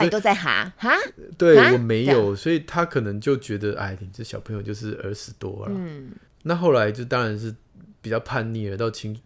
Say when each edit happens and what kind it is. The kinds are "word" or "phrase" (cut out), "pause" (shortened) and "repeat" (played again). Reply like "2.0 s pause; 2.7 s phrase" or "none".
6.3 s pause

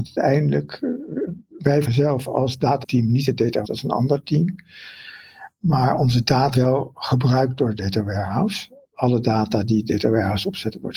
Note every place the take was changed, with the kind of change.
1.8 s word; 2.8 s word; 3.6 s word; 6.5 s word

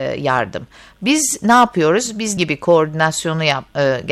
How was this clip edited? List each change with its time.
2.4 s word

